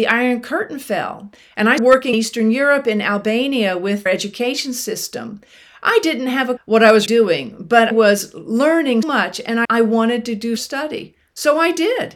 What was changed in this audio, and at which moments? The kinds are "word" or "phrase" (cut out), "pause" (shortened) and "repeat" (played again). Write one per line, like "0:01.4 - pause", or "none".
0:01.8 - word
0:02.1 - word
0:04.1 - word
0:06.6 - word
0:07.1 - word
0:07.9 - word
0:09.0 - word
0:09.6 - word
0:10.6 - word